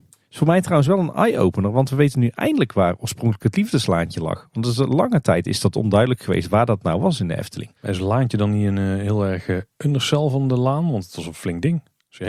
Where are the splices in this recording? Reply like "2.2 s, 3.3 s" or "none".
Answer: 7.8 s